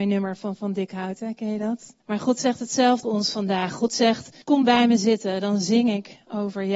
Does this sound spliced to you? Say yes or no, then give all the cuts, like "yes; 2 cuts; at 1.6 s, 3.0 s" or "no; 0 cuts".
yes; 3 cuts; at 2.0 s, 3.0 s, 4.4 s